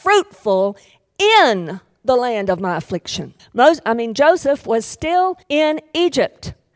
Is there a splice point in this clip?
yes; 2 cuts; at 3.4 s, 5.4 s

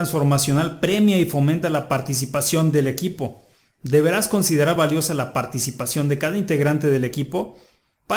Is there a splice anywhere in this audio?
no; 0 cuts

